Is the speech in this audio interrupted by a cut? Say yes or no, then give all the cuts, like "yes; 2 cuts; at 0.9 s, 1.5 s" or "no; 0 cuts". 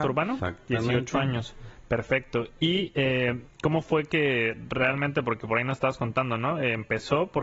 no; 0 cuts